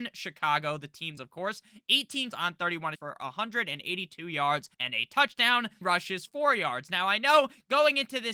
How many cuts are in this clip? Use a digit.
6